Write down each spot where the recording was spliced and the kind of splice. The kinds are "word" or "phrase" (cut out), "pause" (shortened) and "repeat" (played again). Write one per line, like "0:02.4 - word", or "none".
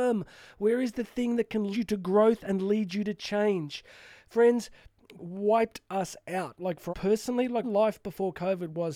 0:01.7 - word
0:05.2 - word
0:06.9 - word
0:07.6 - word